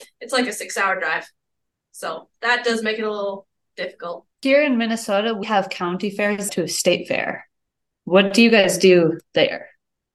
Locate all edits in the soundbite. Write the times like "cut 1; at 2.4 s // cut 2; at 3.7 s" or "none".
cut 1; at 4.3 s // cut 2; at 5.4 s // cut 3; at 6.5 s